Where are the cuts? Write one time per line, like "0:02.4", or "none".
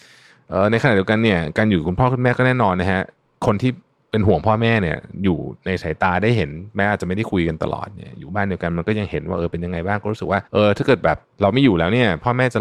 0:10.5
0:11.2